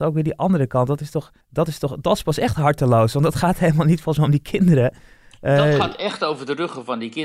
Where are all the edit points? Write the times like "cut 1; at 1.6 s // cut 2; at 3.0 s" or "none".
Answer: cut 1; at 1.4 s